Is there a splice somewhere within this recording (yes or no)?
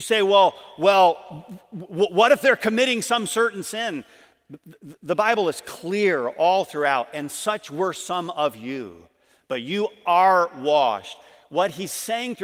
no